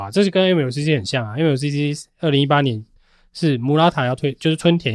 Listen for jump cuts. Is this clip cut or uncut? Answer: uncut